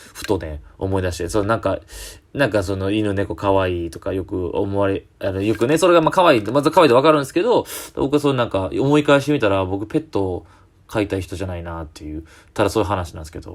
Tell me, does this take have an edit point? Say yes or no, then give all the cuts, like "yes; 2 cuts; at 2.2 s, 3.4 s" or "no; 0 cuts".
no; 0 cuts